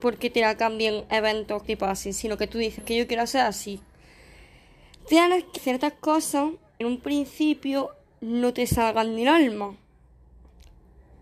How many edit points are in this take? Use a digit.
4